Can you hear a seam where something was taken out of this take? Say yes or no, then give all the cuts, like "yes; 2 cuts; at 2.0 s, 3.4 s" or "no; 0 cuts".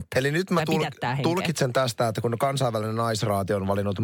no; 0 cuts